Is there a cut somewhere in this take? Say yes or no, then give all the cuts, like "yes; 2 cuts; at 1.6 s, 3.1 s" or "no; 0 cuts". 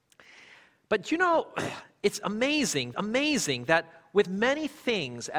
yes; 2 cuts; at 2.9 s, 4.2 s